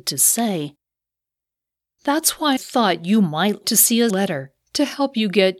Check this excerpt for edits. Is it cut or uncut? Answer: cut